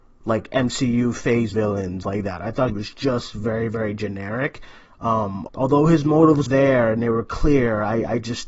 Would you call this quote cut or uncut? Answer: cut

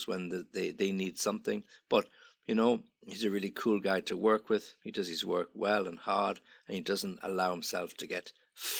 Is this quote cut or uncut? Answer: uncut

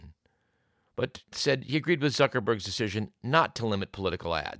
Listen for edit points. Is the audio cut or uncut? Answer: cut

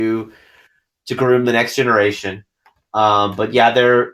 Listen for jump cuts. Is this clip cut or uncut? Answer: uncut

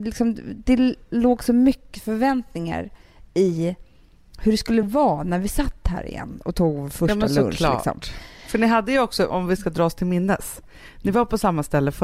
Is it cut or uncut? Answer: uncut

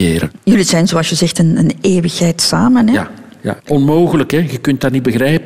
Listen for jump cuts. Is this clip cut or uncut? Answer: cut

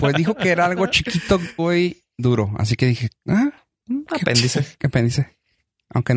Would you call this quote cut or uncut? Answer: cut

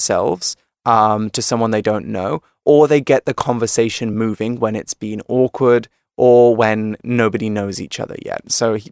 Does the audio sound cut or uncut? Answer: uncut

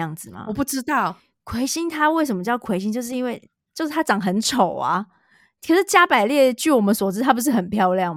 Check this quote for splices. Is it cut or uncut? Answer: uncut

